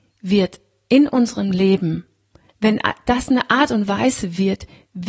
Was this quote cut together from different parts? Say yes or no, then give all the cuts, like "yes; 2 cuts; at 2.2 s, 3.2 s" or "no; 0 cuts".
no; 0 cuts